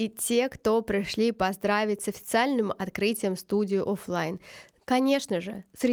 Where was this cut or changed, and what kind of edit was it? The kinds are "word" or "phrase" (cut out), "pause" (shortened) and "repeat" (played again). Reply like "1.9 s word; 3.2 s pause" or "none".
none